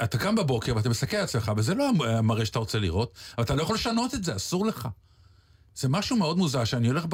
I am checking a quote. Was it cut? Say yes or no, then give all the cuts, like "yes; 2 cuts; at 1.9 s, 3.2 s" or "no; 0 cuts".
no; 0 cuts